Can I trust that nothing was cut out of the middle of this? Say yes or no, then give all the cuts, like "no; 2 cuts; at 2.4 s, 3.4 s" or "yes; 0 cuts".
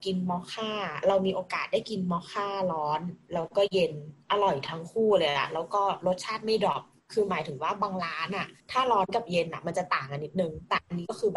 no; 1 cut; at 8.6 s